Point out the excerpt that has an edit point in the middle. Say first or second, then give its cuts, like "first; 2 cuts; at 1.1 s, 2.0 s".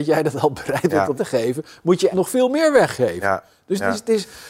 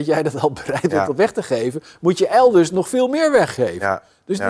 first; 2 cuts; at 1.2 s, 2.1 s